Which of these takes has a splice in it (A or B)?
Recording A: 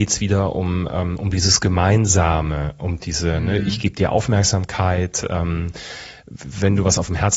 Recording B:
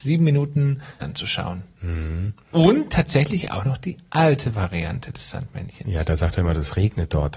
B